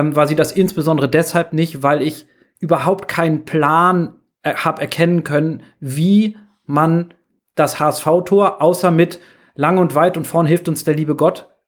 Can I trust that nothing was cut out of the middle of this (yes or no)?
yes